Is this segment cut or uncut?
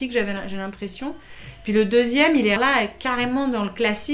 cut